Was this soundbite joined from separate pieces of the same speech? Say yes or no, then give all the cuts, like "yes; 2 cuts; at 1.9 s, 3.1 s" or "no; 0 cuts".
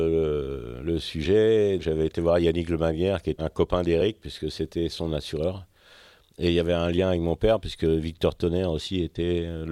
yes; 2 cuts; at 1.8 s, 3.4 s